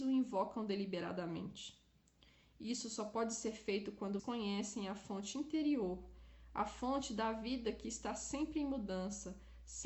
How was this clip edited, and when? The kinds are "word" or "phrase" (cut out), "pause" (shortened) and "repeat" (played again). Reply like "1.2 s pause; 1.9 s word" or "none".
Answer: 4.2 s word